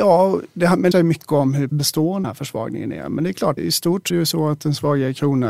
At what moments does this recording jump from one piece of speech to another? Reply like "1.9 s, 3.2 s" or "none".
0.9 s, 1.7 s, 2.2 s, 3.6 s, 4.1 s